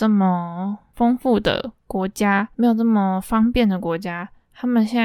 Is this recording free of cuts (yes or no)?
no